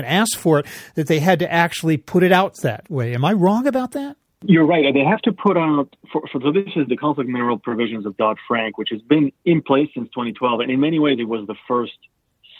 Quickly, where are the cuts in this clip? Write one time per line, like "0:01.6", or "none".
0:06.9
0:09.4